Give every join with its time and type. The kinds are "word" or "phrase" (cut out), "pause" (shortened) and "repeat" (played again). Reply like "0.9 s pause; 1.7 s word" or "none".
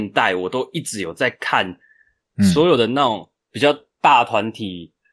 none